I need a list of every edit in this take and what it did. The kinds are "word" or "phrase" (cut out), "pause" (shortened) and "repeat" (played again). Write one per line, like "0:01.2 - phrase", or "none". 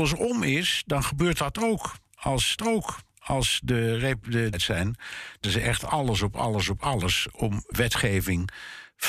0:02.6 - repeat
0:04.5 - phrase
0:05.4 - word
0:07.7 - word